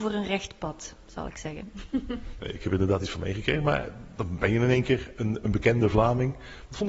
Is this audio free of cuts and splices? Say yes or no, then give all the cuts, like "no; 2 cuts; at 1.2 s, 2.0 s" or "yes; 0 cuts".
yes; 0 cuts